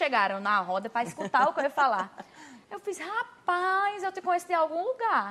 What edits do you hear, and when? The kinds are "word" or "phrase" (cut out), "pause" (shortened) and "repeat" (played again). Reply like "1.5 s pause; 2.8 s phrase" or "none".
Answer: none